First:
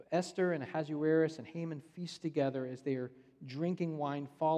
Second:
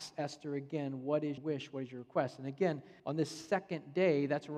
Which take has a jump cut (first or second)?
second